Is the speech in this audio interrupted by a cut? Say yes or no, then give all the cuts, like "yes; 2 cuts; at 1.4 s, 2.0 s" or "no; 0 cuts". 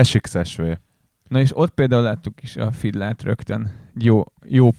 no; 0 cuts